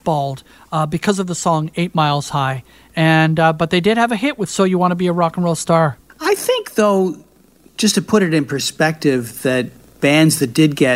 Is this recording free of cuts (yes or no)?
yes